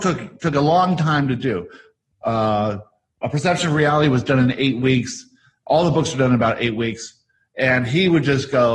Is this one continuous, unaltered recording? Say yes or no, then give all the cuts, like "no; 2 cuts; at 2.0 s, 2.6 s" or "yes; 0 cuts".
yes; 0 cuts